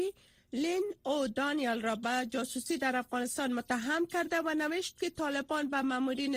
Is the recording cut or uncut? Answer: uncut